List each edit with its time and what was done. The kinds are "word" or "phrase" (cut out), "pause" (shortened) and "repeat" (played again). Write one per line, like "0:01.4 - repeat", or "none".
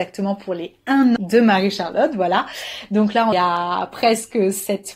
0:01.2 - word
0:03.3 - word